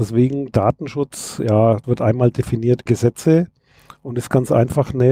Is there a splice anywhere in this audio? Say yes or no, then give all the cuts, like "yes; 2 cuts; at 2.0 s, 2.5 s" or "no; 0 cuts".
yes; 2 cuts; at 1.8 s, 2.9 s